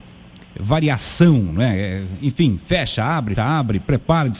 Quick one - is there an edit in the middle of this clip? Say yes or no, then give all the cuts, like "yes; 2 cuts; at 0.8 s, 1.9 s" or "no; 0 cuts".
yes; 1 cut; at 3.4 s